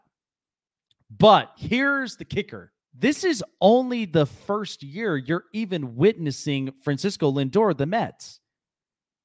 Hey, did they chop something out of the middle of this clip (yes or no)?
yes